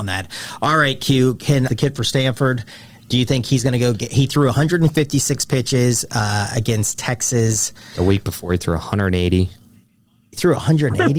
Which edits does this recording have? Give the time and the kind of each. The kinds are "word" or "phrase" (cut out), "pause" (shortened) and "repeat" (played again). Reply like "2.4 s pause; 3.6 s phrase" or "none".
1.7 s phrase